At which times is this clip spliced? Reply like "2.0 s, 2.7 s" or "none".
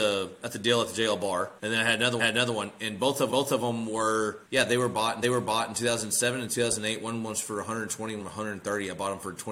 1.6 s, 2.2 s, 3.3 s, 4.4 s, 5.2 s, 8.2 s